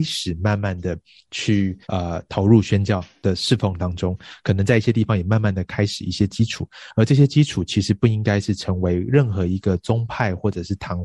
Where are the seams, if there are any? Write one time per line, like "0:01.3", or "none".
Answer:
0:01.8